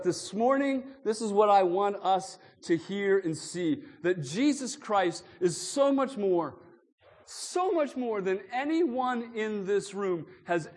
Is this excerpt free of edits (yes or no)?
yes